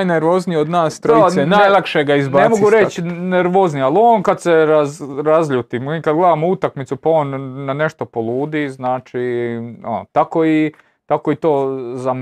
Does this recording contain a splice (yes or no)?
no